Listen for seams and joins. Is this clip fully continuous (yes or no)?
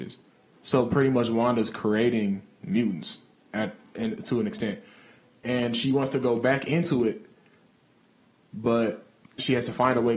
yes